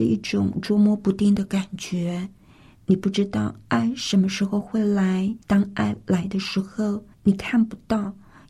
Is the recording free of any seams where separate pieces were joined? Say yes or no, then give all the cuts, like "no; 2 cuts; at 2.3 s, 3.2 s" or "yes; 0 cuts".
no; 2 cuts; at 5.4 s, 7.1 s